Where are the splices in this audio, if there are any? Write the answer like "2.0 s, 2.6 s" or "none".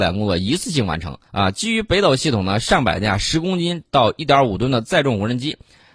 1.3 s

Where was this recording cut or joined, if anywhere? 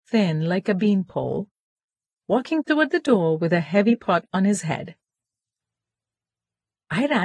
none

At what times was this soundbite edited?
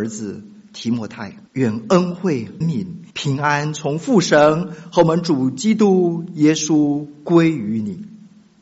1.5 s, 2.6 s, 3.1 s

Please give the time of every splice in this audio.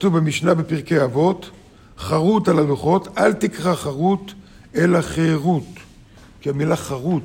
none

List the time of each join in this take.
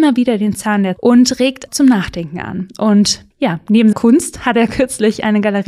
1.0 s, 1.7 s, 3.9 s

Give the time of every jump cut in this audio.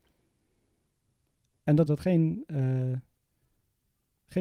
1.9 s

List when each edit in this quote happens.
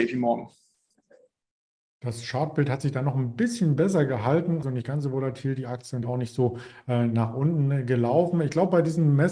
4.6 s, 6.0 s

